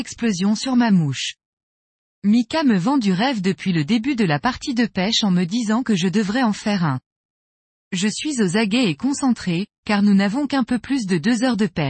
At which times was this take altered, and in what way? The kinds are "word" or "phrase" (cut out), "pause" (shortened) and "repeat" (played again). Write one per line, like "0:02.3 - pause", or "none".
none